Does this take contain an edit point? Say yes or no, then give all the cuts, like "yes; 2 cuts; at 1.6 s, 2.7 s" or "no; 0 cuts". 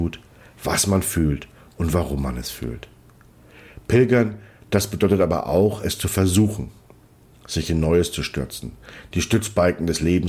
no; 0 cuts